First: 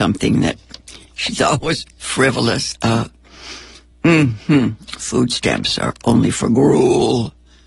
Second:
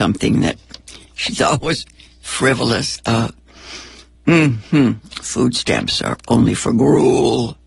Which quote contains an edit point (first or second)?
first